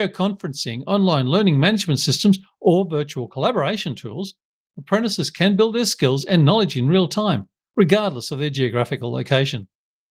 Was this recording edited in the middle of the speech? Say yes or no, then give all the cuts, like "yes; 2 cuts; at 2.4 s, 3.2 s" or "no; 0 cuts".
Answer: no; 0 cuts